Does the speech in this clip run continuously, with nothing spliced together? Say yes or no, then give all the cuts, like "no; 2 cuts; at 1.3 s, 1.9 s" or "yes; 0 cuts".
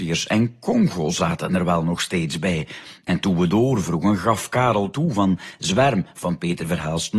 yes; 0 cuts